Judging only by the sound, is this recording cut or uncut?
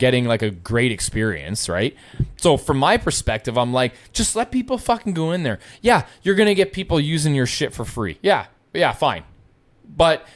uncut